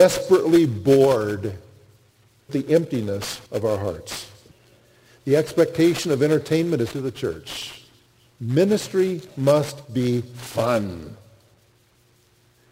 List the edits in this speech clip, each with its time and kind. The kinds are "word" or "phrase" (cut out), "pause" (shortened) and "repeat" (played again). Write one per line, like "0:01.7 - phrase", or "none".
0:02.5 - word
0:03.5 - pause
0:04.5 - pause
0:06.9 - phrase
0:08.1 - pause